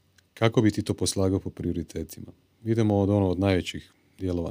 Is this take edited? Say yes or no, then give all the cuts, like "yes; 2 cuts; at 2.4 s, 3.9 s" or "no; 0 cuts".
no; 0 cuts